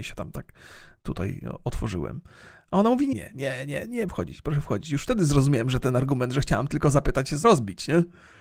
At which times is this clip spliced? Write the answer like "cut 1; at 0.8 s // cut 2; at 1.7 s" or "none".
cut 1; at 3.1 s // cut 2; at 4.1 s // cut 3; at 7.4 s